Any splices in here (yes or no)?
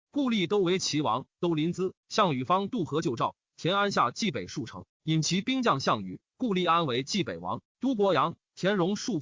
yes